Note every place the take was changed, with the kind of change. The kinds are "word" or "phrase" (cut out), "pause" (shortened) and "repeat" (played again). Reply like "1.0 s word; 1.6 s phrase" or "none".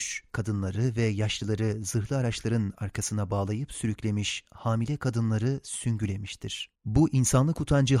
6.8 s pause

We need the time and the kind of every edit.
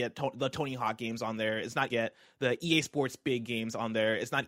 1.9 s phrase

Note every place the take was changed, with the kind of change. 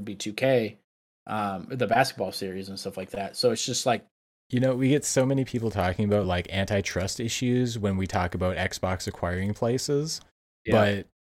none

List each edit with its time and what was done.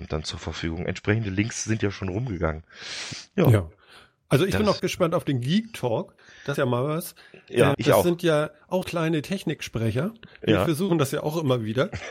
4.8 s word; 6.6 s word; 7.7 s word; 8.8 s word

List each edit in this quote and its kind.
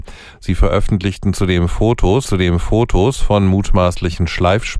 2.2 s repeat

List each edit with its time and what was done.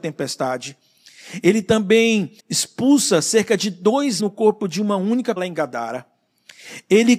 2.4 s pause; 4.2 s phrase; 5.4 s word

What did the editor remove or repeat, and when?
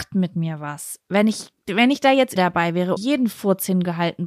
1.6 s pause; 2.4 s word; 3.0 s word

